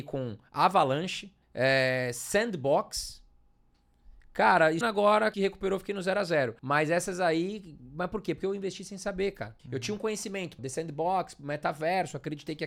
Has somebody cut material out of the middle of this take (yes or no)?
yes